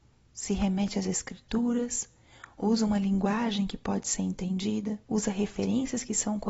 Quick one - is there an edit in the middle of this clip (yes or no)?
yes